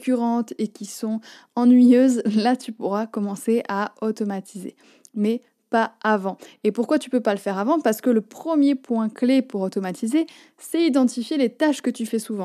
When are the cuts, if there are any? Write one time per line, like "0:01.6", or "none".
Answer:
none